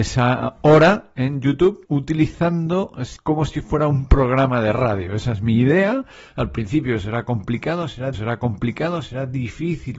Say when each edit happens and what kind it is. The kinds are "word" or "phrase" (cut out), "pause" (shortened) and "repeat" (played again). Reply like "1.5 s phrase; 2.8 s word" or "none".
1.9 s word; 3.2 s word; 8.1 s repeat